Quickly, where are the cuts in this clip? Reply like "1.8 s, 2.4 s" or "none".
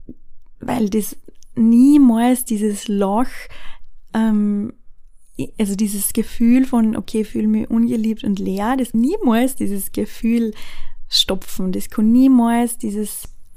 8.9 s